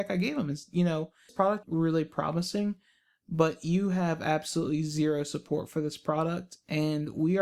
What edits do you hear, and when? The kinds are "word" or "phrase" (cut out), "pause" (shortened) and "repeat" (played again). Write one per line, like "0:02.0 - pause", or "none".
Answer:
0:01.3 - word
0:01.6 - word